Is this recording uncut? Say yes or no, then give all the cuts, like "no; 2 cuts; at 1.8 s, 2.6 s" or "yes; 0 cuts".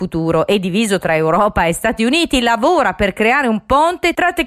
yes; 0 cuts